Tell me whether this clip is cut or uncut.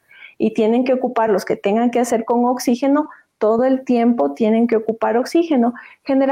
uncut